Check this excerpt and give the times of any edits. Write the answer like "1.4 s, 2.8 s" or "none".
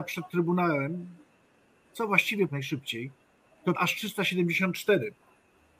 2.5 s, 3.8 s

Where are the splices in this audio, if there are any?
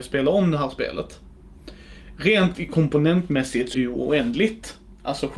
2.5 s, 3.7 s

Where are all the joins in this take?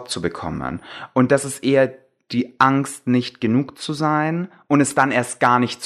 none

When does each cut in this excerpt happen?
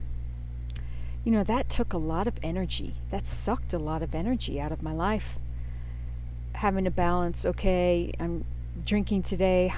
none

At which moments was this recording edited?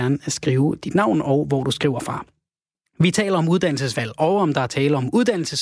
none

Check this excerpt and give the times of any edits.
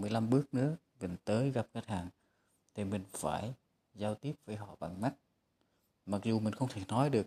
none

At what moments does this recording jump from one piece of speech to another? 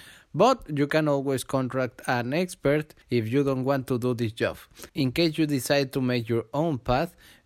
3.0 s, 4.9 s

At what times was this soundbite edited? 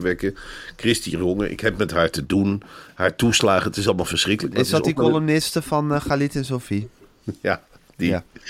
none

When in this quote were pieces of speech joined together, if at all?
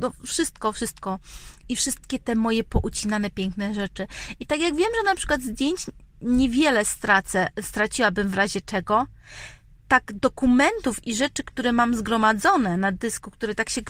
none

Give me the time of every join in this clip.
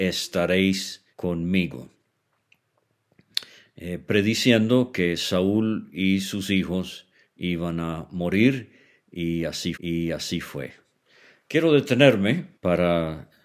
1.1 s, 9.7 s, 12.5 s

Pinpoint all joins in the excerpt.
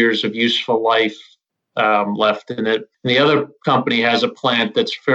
none

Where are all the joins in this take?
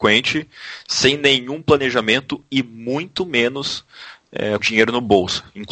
4.6 s

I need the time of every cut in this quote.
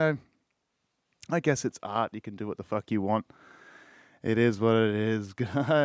none

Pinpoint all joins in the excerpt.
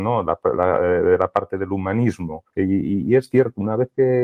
2.5 s

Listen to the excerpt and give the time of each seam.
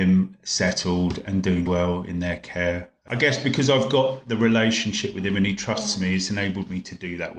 1.7 s

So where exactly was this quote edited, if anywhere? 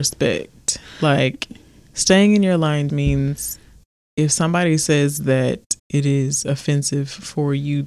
2.9 s, 5.8 s

